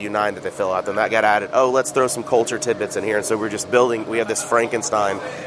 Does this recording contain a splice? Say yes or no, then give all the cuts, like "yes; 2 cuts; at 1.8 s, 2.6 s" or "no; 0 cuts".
no; 0 cuts